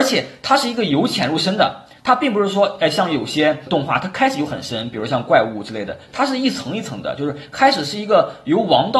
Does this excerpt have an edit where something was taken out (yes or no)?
no